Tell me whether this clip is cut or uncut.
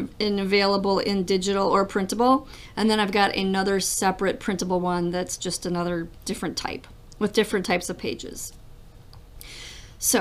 uncut